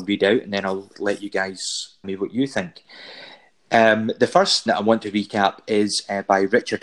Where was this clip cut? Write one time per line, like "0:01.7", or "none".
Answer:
0:00.9
0:02.0
0:04.7